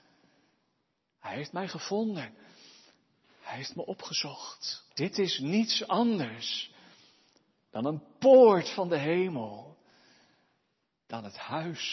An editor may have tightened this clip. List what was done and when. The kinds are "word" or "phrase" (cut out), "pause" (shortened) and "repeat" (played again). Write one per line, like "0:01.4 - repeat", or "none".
0:04.9 - pause